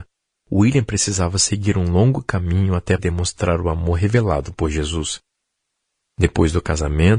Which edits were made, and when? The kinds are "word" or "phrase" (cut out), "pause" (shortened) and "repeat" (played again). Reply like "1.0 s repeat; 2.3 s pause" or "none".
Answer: 3.0 s word